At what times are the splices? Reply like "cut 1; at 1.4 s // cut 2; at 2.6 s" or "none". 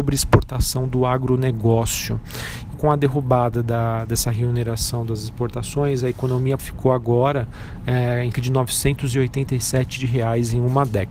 cut 1; at 2.7 s // cut 2; at 6.6 s // cut 3; at 8.3 s // cut 4; at 10.0 s

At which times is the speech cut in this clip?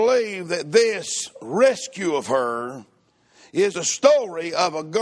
cut 1; at 3.7 s

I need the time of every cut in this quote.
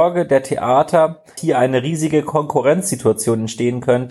cut 1; at 1.4 s

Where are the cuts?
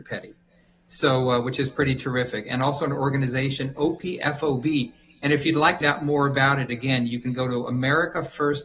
cut 1; at 5.8 s

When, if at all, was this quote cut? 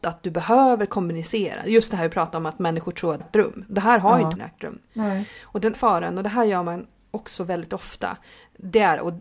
cut 1; at 3.2 s // cut 2; at 4.4 s // cut 3; at 5.7 s

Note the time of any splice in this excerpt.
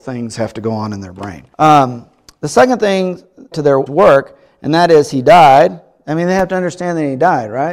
cut 1; at 1.5 s // cut 2; at 3.5 s // cut 3; at 3.9 s

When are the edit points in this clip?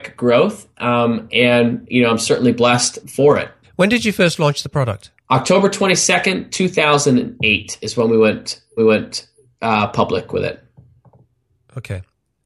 cut 1; at 3.0 s // cut 2; at 3.6 s // cut 3; at 5.2 s // cut 4; at 8.8 s

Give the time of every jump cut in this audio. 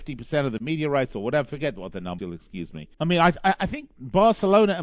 cut 1; at 2.2 s // cut 2; at 2.9 s

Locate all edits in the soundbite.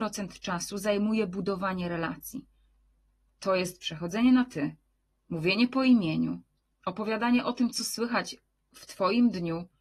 none

